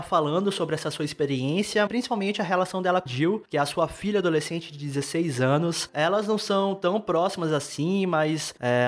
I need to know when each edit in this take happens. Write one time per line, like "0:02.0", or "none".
0:01.9
0:03.1